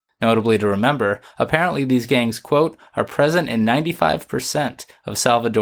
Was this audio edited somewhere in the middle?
no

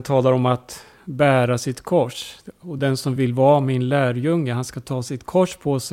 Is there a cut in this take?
no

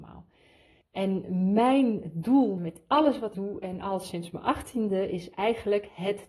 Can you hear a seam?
yes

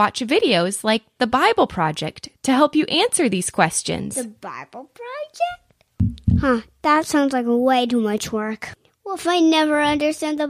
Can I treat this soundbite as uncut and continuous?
yes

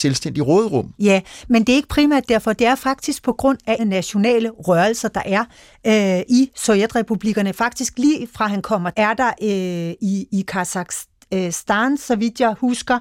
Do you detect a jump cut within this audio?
yes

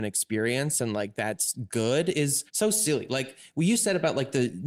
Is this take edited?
yes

